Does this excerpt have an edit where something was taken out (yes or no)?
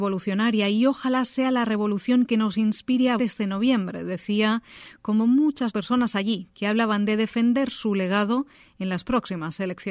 yes